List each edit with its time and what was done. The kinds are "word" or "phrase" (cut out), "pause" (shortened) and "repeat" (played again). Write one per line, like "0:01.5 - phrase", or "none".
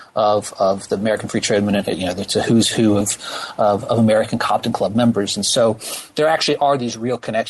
none